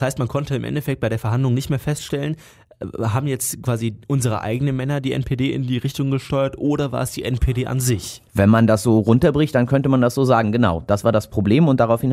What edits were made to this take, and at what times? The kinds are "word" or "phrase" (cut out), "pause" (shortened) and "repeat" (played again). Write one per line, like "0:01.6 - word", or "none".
0:08.3 - pause